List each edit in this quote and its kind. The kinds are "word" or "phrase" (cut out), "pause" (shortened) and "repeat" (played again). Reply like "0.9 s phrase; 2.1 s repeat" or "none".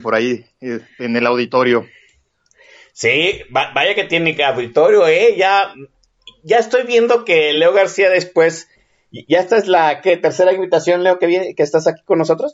none

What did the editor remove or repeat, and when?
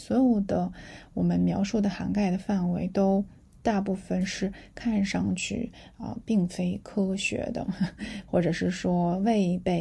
none

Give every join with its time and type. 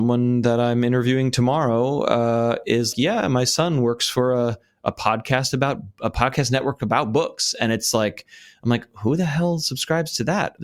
2.9 s word

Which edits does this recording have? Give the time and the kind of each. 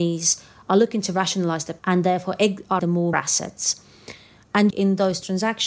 1.8 s word; 2.8 s word; 3.1 s word; 4.7 s word

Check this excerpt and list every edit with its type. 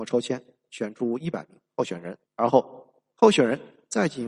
2.3 s pause

